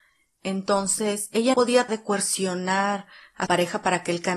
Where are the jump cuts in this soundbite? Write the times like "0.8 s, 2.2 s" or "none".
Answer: 1.5 s, 1.9 s, 3.5 s